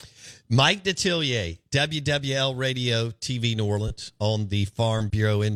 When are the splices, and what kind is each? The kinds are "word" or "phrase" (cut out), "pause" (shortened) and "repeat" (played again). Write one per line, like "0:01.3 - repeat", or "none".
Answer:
none

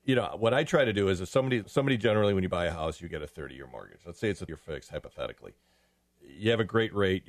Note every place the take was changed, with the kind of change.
0:01.6 - word
0:04.5 - word

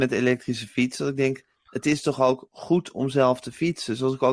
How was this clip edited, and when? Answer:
none

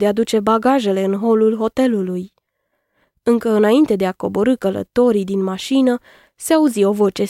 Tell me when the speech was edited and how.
none

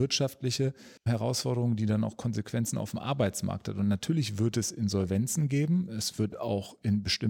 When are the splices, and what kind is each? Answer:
0:01.0 - pause

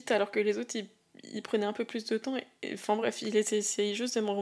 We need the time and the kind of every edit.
none

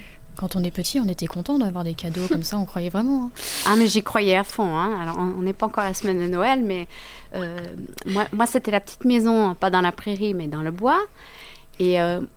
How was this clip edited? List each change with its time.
none

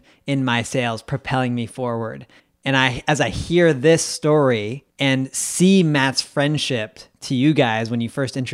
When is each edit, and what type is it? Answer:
0:02.4 - pause
0:04.9 - pause

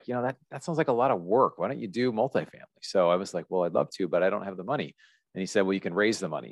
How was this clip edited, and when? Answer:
none

